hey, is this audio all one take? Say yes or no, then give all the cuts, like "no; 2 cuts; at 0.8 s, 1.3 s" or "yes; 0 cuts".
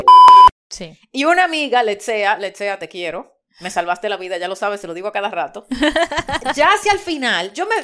yes; 0 cuts